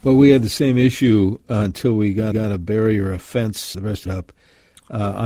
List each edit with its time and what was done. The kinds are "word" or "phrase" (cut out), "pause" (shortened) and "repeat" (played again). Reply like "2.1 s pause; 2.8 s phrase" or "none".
2.3 s repeat; 3.7 s word; 4.1 s phrase